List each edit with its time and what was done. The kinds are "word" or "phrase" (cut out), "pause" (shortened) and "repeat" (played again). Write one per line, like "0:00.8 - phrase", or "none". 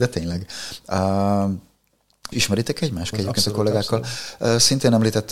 0:02.3 - word
0:03.1 - word